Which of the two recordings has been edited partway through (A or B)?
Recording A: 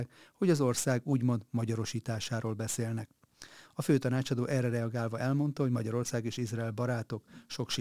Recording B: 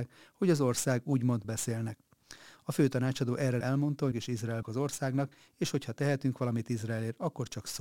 B